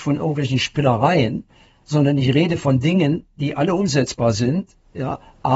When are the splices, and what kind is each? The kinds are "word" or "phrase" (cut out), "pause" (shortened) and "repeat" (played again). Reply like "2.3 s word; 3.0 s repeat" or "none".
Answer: none